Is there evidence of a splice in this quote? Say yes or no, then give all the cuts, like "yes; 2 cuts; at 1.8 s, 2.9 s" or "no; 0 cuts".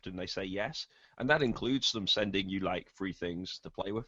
no; 0 cuts